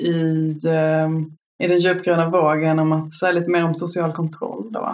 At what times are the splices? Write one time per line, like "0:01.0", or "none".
0:01.4